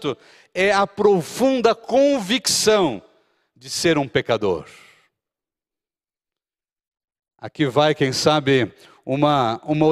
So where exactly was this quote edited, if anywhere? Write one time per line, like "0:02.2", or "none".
none